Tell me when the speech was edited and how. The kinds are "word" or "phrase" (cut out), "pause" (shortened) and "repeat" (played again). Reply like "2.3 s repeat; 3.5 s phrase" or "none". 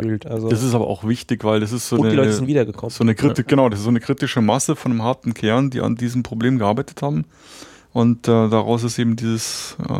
none

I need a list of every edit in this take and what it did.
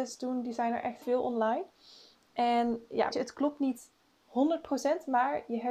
1.0 s word; 3.1 s word

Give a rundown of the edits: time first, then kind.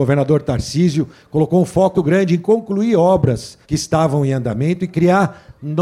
2.0 s word; 3.6 s pause

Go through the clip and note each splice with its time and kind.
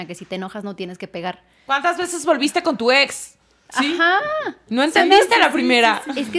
none

